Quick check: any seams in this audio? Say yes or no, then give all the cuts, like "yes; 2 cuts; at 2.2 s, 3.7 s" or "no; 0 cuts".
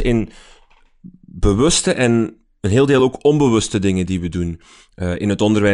no; 0 cuts